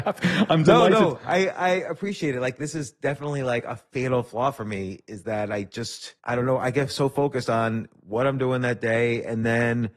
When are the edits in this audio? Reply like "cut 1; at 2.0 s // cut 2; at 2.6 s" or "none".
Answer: cut 1; at 6.2 s